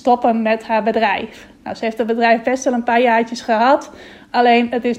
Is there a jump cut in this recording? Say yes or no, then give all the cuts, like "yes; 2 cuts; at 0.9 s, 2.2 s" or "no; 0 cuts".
no; 0 cuts